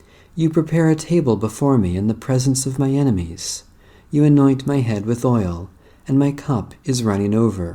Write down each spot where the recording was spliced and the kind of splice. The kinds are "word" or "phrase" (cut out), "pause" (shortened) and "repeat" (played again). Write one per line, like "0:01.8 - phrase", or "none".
none